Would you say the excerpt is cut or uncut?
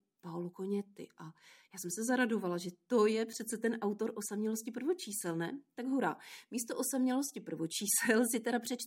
uncut